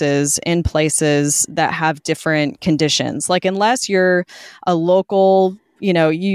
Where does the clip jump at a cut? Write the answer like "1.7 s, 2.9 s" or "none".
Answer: none